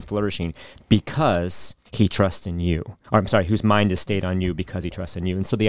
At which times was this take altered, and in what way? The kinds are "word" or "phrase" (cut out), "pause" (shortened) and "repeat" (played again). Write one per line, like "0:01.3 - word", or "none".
0:01.8 - pause
0:03.0 - pause